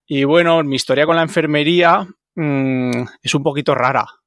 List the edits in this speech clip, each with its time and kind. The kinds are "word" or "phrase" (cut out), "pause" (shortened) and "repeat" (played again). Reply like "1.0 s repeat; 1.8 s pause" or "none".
none